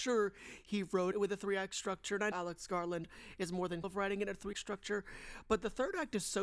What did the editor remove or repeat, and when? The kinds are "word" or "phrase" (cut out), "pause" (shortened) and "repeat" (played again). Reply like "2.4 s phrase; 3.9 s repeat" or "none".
1.1 s word; 2.3 s word; 3.8 s word; 4.5 s word